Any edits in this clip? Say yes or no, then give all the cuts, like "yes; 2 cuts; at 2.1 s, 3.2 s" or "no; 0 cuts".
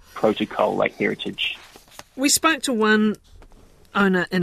no; 0 cuts